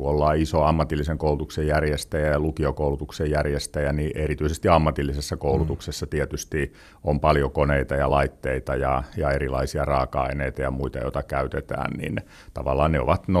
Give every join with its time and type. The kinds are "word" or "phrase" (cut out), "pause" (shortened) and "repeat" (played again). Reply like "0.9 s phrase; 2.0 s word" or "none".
none